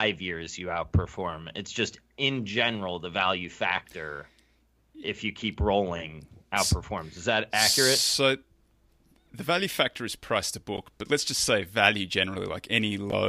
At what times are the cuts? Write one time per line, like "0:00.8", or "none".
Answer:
none